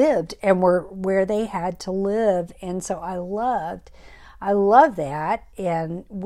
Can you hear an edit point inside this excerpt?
no; 0 cuts

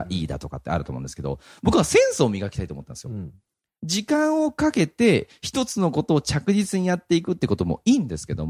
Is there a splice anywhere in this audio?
no; 0 cuts

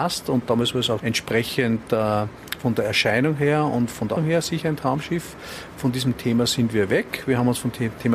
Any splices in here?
yes; 2 cuts; at 1.0 s, 4.2 s

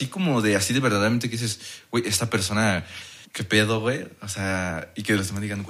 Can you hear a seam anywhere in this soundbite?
yes; 1 cut; at 3.2 s

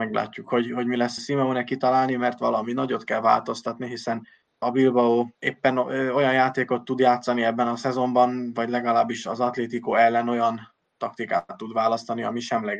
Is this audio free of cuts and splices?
no; 3 cuts; at 1.2 s, 4.6 s, 5.3 s

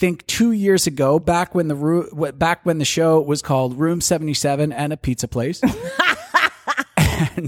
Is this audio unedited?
yes; 0 cuts

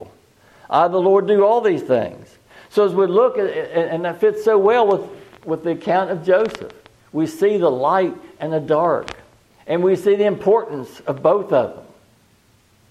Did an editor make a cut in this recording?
no; 0 cuts

